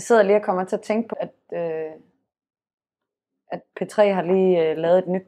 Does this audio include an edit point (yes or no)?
yes